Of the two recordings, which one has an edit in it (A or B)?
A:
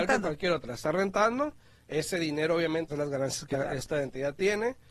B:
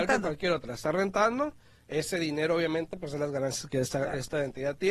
A